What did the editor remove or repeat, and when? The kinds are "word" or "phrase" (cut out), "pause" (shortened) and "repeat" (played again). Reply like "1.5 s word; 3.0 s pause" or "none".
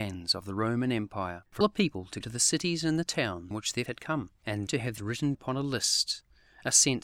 1.6 s word; 2.2 s word; 3.5 s word; 3.9 s word; 4.7 s word; 5.0 s word; 5.3 s word